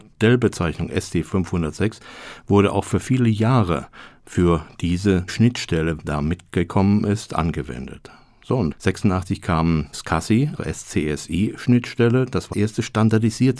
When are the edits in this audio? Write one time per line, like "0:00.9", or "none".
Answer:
0:05.3
0:06.0
0:08.7
0:09.9
0:10.6
0:12.5